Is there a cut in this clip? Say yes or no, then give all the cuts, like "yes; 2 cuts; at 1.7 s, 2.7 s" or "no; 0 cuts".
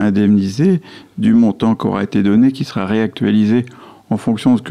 no; 0 cuts